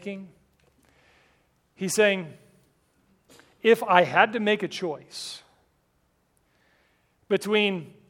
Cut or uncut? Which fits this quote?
uncut